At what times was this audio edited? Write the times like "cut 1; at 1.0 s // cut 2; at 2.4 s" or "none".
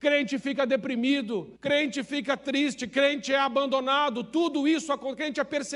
cut 1; at 1.6 s

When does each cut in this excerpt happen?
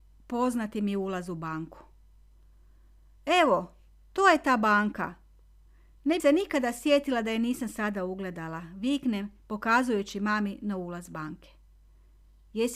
cut 1; at 6.2 s

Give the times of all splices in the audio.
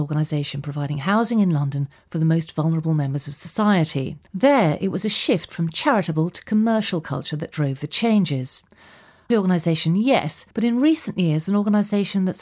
cut 1; at 4.3 s // cut 2; at 9.3 s // cut 3; at 10.5 s

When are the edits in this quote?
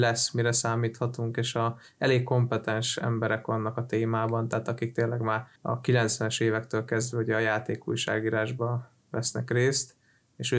cut 1; at 5.6 s

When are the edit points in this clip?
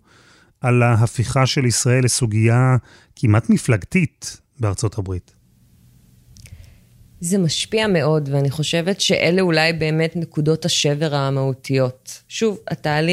none

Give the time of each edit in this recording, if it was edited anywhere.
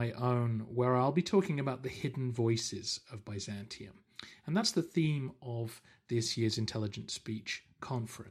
none

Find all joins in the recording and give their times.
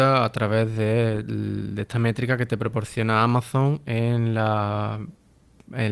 none

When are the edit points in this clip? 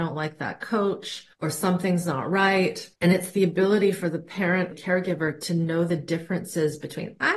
cut 1; at 1.3 s // cut 2; at 2.9 s // cut 3; at 4.7 s

